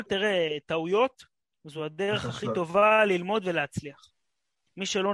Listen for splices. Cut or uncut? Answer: uncut